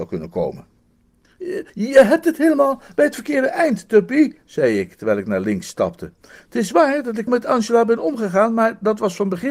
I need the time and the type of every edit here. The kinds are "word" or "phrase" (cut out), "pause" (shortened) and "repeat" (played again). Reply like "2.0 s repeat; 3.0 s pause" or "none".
1.7 s pause; 7.3 s word